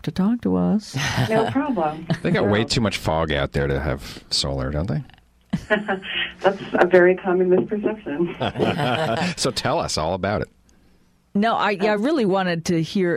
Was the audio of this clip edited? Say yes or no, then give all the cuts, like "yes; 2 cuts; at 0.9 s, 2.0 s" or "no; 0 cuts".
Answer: no; 0 cuts